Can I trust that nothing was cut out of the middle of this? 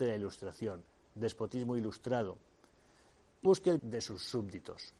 no; 2 cuts; at 3.4 s, 3.8 s

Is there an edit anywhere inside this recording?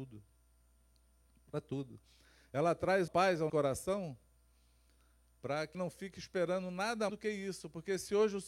yes; 4 cuts; at 3.1 s, 3.5 s, 5.7 s, 7.1 s

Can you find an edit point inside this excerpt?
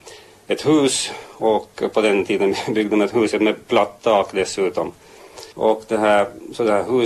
yes; 1 cut; at 5.5 s

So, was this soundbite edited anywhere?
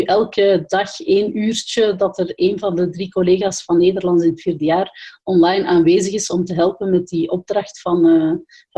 no; 0 cuts

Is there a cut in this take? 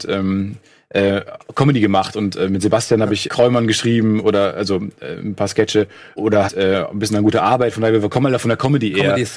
yes; 3 cuts; at 3.3 s, 6.2 s, 6.5 s

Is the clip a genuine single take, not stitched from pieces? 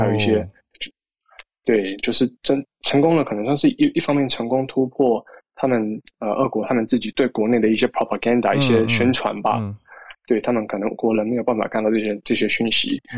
yes; 0 cuts

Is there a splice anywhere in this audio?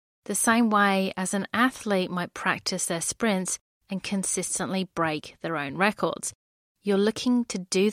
no; 0 cuts

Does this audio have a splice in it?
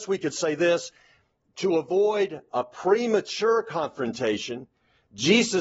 no; 0 cuts

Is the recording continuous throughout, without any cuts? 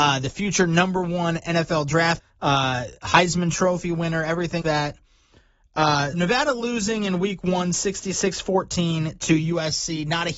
no; 3 cuts; at 2.2 s, 4.6 s, 6.1 s

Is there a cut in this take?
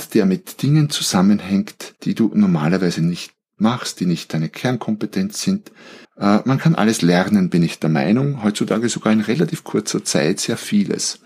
yes; 2 cuts; at 2.0 s, 6.0 s

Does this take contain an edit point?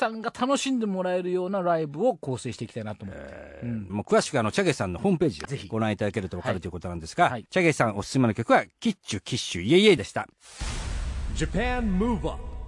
yes; 3 cuts; at 3.9 s, 5.4 s, 7.5 s

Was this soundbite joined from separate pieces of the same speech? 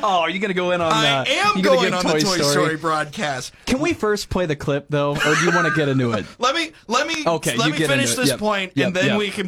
yes; 1 cut; at 1.9 s

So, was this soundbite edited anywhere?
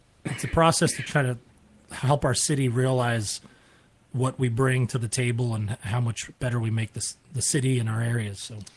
yes; 1 cut; at 2.2 s

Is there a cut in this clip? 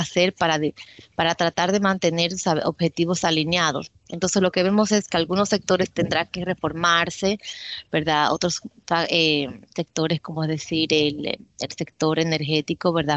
no; 0 cuts

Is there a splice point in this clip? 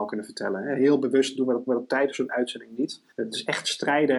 yes; 2 cuts; at 1.7 s, 3.1 s

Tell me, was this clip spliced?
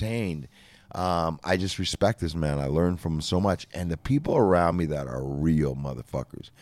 no; 0 cuts

